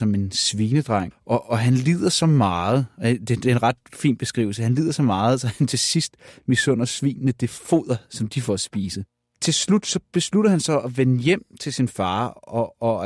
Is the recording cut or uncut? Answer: uncut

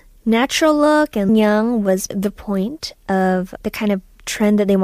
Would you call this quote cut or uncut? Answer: cut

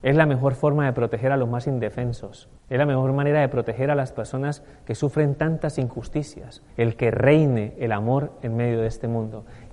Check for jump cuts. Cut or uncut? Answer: cut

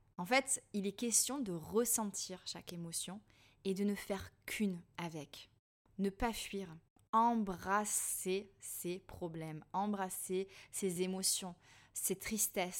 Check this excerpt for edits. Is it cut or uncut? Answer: uncut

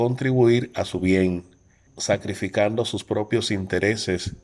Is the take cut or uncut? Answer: cut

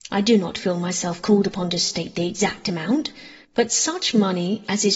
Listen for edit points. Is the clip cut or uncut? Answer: cut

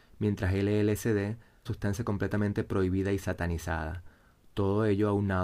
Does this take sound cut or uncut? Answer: cut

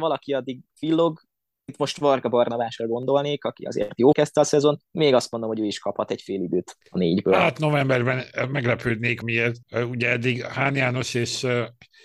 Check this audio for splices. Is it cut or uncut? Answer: cut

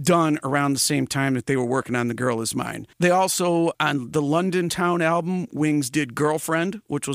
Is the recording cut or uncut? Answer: cut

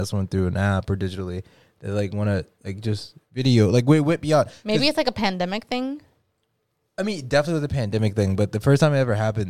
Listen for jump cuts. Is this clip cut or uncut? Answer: uncut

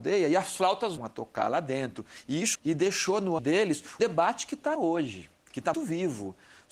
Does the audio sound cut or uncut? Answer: cut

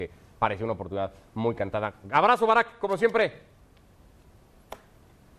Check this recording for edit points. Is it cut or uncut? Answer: uncut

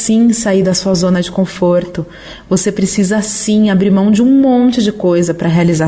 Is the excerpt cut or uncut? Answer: uncut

